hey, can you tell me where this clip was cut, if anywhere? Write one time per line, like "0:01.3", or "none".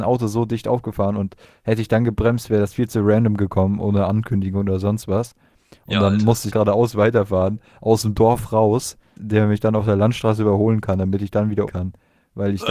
0:06.5
0:09.2
0:11.7